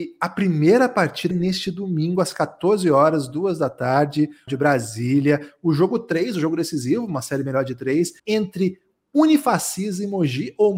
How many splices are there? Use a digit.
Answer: 3